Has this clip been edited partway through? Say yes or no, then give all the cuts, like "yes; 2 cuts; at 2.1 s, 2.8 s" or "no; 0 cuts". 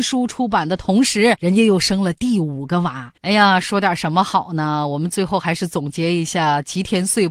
yes; 1 cut; at 3.2 s